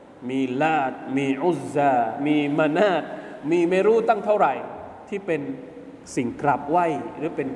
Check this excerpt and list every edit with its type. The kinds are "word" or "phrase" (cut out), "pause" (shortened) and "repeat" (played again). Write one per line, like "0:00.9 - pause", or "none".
0:06.0 - pause